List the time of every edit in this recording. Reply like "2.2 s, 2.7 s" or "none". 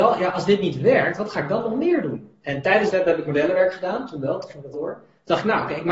2.9 s, 4.7 s